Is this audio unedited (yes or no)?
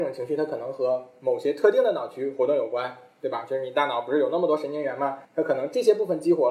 no